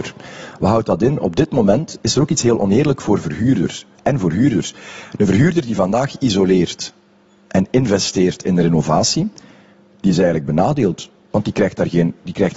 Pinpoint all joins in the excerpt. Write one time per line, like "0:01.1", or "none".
none